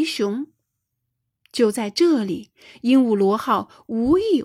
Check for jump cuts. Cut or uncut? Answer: uncut